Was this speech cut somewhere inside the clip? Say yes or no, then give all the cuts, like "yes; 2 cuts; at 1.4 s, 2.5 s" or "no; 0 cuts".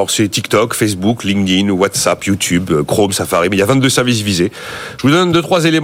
no; 0 cuts